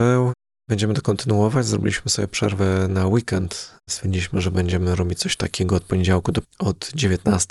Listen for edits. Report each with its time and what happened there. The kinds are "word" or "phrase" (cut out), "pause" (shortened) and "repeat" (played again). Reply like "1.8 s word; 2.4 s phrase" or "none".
3.8 s pause; 6.4 s word